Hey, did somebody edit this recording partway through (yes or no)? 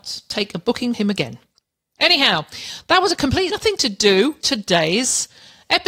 yes